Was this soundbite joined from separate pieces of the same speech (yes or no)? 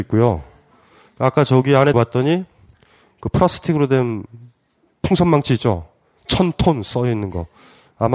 yes